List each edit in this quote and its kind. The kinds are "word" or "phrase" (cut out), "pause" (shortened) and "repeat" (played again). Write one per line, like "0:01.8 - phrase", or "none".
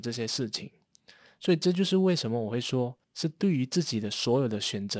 0:03.0 - pause